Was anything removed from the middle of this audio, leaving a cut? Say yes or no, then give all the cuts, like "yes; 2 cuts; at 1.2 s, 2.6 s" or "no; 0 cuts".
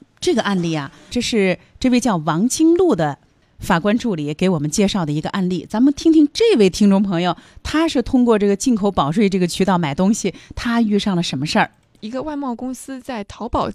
yes; 1 cut; at 1.1 s